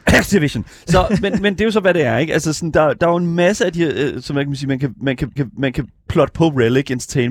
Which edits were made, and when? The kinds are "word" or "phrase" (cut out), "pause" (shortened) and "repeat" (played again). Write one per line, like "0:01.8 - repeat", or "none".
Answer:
0:05.4 - repeat